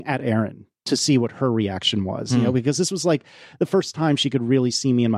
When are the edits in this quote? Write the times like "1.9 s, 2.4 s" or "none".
none